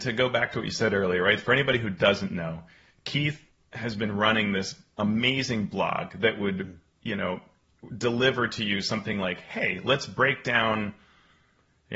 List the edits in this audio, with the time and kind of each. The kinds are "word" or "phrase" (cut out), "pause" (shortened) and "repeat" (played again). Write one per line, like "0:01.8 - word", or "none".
none